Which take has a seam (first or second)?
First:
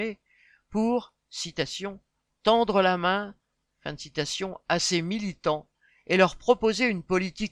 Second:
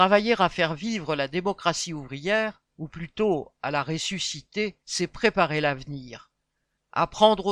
second